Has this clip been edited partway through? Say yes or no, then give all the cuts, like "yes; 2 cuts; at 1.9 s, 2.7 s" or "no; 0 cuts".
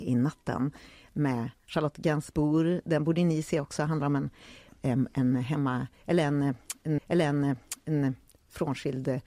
yes; 1 cut; at 7.0 s